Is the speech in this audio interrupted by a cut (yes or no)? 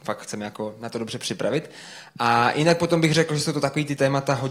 no